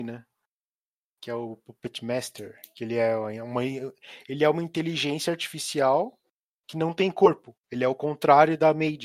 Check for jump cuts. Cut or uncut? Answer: uncut